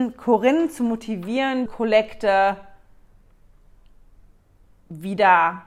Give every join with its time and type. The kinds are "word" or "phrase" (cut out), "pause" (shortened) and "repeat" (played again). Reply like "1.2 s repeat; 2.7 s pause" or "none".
1.7 s word